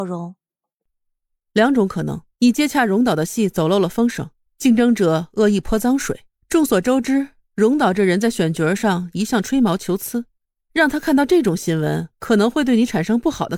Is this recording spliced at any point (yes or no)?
yes